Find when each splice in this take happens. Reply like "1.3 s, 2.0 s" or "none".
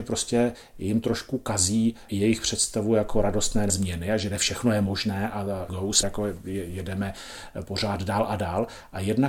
2.1 s, 3.7 s, 5.7 s, 6.0 s